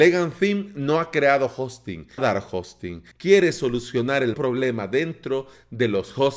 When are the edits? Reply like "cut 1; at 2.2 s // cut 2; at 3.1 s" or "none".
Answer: cut 1; at 2.2 s // cut 2; at 3.1 s // cut 3; at 4.3 s